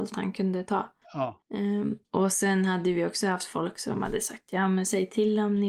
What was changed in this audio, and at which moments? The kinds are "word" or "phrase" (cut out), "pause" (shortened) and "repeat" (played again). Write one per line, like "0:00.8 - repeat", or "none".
0:01.0 - pause